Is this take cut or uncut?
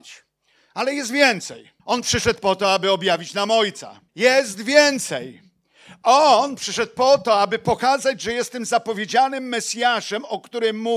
cut